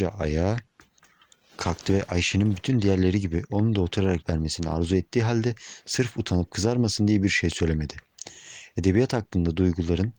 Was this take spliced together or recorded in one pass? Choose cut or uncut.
cut